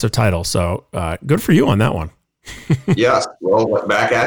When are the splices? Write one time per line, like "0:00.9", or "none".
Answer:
none